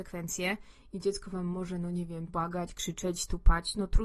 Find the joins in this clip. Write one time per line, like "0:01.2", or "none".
0:02.3

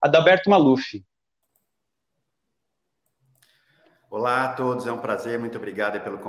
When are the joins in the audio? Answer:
none

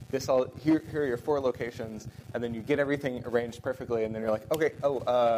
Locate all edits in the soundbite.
none

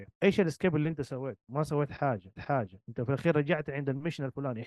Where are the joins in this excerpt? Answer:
0:02.4

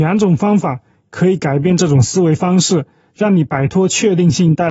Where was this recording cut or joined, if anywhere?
none

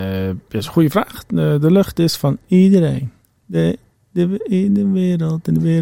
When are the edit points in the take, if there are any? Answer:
none

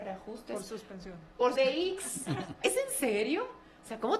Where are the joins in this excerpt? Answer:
0:01.6
0:02.6

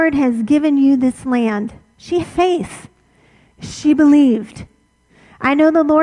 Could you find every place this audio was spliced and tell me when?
0:02.2

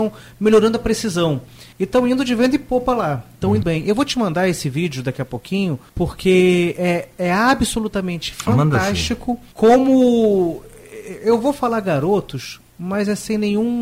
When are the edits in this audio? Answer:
0:01.7
0:03.6
0:05.9
0:09.5

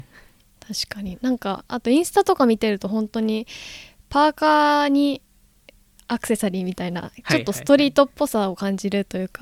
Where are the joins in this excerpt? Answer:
none

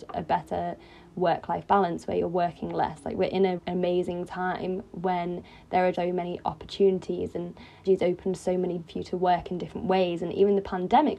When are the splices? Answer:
0:03.6
0:05.9
0:07.8
0:08.9

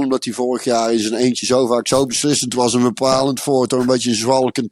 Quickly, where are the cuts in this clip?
none

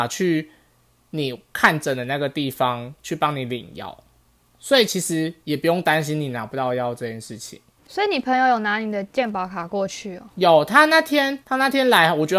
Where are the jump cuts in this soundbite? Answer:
0:11.4

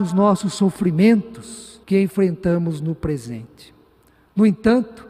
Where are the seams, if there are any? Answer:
0:01.8

